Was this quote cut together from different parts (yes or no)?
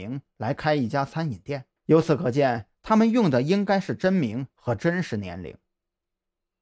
yes